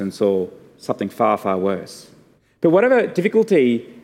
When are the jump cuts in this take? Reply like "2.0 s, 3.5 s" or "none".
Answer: 2.4 s